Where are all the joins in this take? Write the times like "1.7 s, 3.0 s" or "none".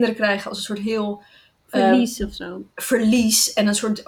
2.7 s